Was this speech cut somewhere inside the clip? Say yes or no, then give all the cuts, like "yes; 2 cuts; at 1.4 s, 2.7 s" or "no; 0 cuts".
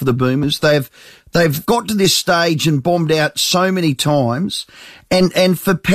no; 0 cuts